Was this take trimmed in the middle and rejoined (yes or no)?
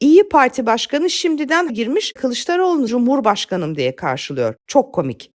yes